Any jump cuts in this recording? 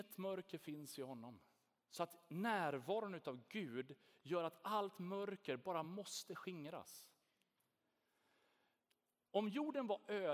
no; 0 cuts

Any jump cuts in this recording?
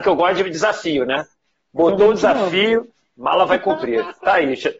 no; 0 cuts

